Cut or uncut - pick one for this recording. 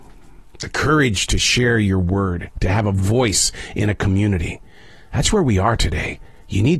uncut